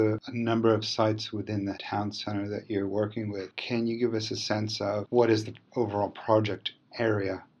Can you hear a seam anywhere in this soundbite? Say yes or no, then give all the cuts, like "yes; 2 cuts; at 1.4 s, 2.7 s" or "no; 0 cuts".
yes; 1 cut; at 1.7 s